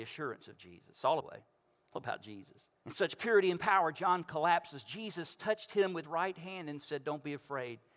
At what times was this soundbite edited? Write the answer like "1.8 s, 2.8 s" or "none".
1.2 s, 1.9 s, 2.8 s, 6.0 s